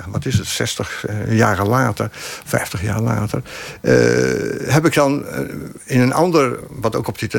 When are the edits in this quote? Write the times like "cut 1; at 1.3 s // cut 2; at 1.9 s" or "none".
none

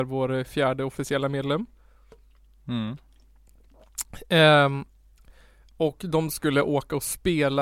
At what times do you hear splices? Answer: none

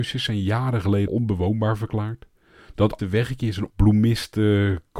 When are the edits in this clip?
cut 1; at 1.1 s // cut 2; at 3.0 s // cut 3; at 3.7 s

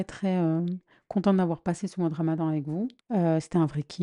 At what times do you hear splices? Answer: cut 1; at 3.0 s

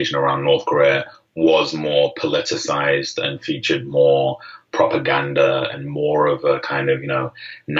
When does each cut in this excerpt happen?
none

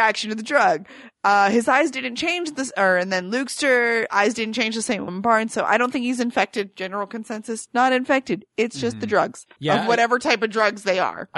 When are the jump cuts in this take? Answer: cut 1; at 5.1 s

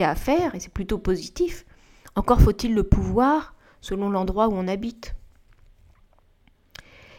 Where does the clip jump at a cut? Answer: none

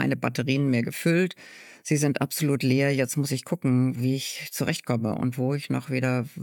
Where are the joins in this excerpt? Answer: none

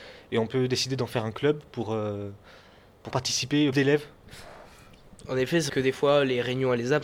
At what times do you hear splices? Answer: cut 1; at 3.1 s // cut 2; at 3.7 s // cut 3; at 5.7 s

